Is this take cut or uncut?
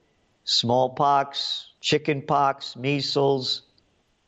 cut